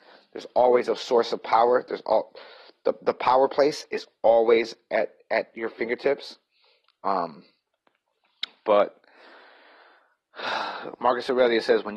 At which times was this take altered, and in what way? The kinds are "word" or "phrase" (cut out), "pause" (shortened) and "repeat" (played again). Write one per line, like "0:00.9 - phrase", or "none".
none